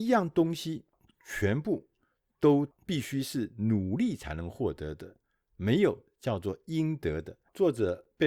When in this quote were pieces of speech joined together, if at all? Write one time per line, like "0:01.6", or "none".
none